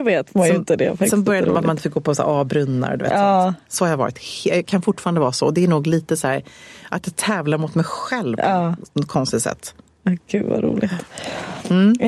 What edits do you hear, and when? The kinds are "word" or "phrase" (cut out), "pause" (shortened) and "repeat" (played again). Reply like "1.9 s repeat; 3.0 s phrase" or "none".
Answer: none